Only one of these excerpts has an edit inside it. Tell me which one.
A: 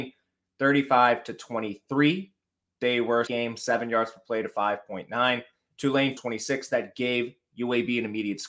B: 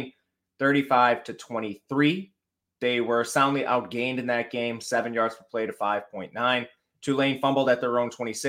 A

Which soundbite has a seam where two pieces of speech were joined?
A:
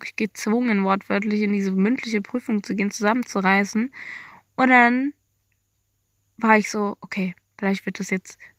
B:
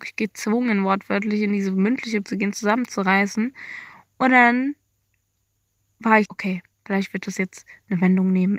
B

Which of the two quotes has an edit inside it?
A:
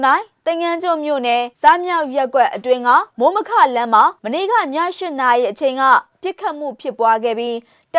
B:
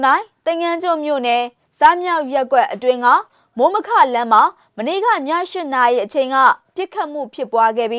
A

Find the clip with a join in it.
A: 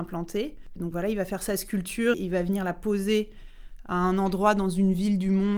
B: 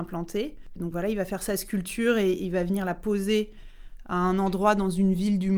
A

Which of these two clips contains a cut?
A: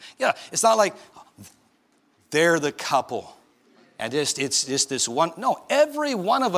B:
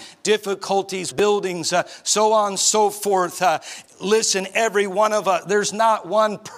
B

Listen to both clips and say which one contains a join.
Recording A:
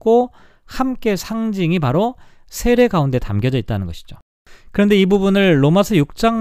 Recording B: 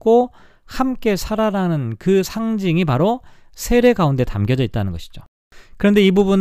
A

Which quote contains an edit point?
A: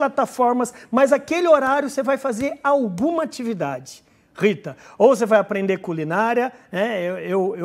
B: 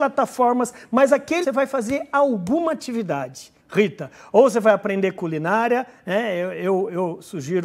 B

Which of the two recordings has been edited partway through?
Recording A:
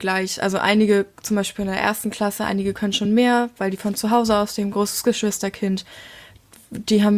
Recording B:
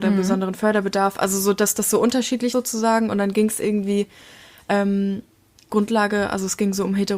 B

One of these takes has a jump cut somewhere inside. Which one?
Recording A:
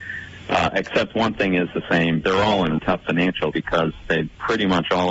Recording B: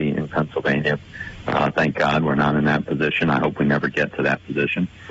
A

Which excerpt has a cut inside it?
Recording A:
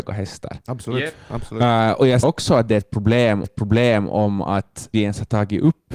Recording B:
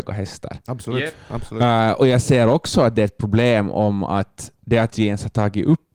A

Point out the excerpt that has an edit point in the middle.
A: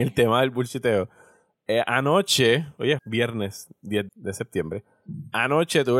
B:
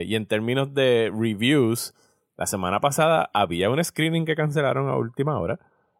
A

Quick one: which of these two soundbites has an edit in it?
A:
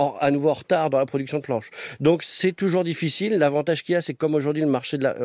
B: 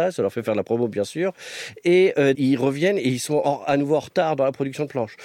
B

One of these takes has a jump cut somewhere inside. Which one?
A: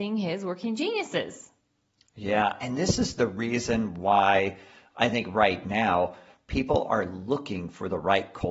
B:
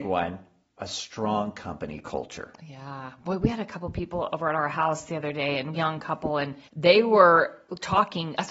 B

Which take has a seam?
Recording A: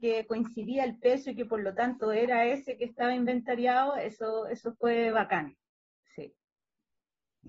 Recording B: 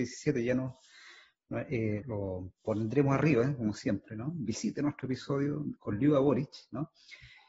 B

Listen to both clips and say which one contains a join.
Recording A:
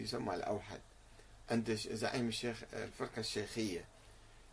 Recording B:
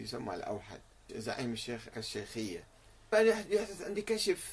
B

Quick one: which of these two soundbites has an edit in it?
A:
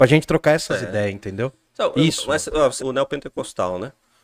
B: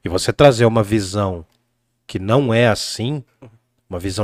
A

